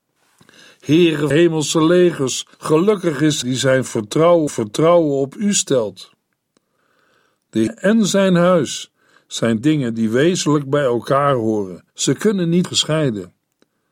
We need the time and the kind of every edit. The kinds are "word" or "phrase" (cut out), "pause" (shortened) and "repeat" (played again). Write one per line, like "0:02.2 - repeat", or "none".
0:01.3 - phrase
0:02.5 - pause
0:03.4 - word
0:04.5 - repeat
0:07.7 - word
0:09.6 - word
0:11.9 - pause
0:12.6 - phrase